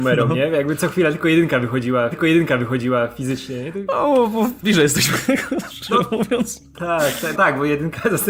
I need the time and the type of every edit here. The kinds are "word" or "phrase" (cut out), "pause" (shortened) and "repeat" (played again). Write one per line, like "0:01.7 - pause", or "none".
0:02.1 - repeat
0:04.6 - word
0:07.3 - word